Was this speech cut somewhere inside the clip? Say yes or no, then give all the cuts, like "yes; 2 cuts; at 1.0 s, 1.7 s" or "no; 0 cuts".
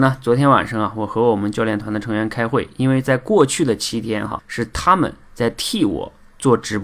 yes; 1 cut; at 4.4 s